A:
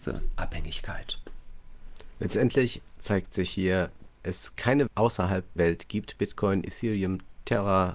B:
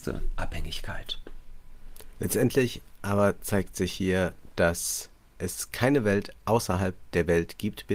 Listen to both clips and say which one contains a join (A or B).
A